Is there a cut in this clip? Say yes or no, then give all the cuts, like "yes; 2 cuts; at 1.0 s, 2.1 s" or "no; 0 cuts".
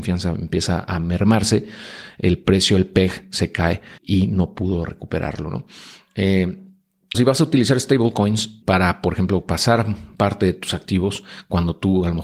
yes; 3 cuts; at 4.0 s, 7.1 s, 8.6 s